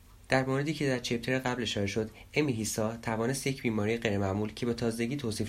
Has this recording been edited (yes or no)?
no